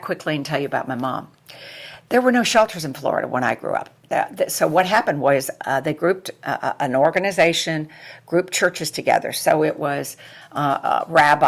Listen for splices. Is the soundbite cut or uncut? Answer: cut